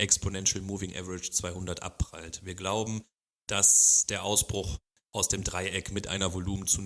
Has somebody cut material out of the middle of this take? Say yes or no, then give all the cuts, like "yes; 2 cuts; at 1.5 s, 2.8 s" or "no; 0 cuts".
no; 0 cuts